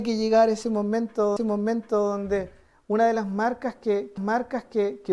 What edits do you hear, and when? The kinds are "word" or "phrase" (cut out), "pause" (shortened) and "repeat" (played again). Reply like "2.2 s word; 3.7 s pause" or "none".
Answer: 1.4 s repeat; 4.2 s repeat